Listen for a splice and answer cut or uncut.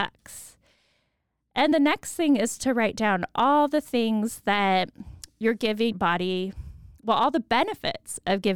cut